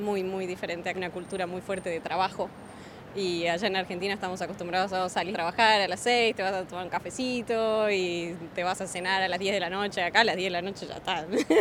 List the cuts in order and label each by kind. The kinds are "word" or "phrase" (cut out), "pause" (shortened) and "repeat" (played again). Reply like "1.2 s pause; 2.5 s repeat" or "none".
0.9 s word; 5.3 s word